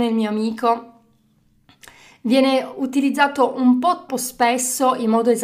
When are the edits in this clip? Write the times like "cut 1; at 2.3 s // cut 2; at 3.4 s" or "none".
cut 1; at 4.1 s